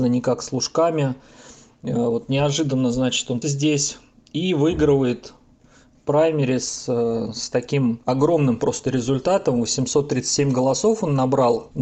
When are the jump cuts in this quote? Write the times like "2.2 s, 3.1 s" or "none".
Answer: 3.4 s